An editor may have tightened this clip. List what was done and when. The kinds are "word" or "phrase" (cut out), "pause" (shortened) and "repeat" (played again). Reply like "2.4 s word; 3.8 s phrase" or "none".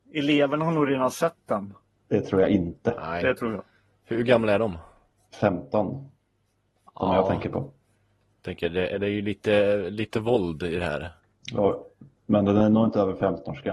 none

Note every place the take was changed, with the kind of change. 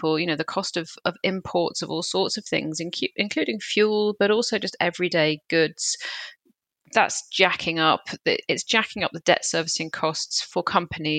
none

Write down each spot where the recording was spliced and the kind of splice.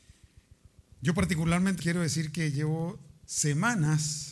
1.8 s word

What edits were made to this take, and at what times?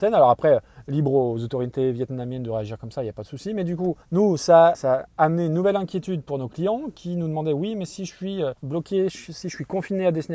4.0 s pause; 4.7 s word; 5.1 s pause; 8.6 s pause

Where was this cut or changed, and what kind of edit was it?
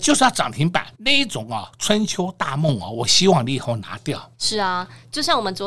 0.9 s pause; 4.3 s pause

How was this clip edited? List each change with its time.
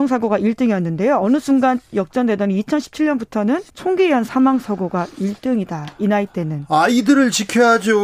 3.7 s pause

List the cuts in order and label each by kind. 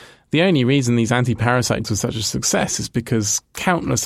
1.8 s word

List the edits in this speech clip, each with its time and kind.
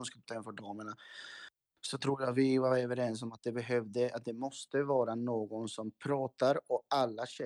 none

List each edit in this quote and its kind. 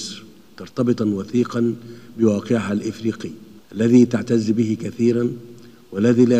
1.0 s word; 3.6 s pause

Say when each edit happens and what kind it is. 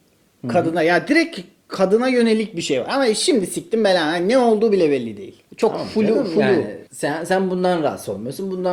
5.5 s pause; 6.9 s pause

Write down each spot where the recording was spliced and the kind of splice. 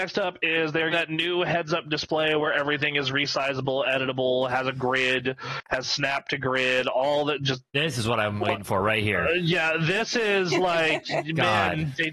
0.9 s word; 7.7 s pause

